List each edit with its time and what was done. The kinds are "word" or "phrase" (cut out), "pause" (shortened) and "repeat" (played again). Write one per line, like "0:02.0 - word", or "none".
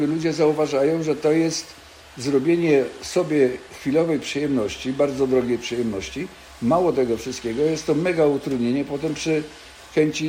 none